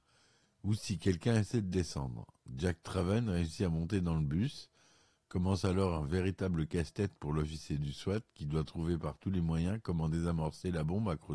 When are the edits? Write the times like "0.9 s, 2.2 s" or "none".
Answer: none